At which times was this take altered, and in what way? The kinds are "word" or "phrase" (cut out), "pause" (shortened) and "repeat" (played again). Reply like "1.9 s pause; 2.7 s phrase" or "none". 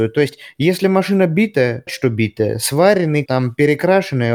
1.9 s word; 3.3 s word